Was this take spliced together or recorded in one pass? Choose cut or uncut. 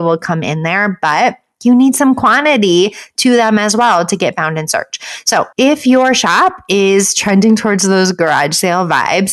cut